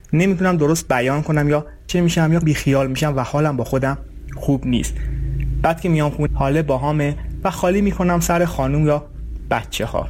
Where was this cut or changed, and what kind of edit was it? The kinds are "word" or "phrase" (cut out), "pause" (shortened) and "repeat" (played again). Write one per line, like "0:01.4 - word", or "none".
0:01.9 - word
0:02.4 - word
0:06.3 - word